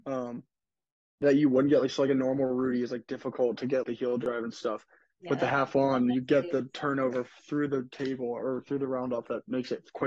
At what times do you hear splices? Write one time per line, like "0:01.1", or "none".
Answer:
0:03.8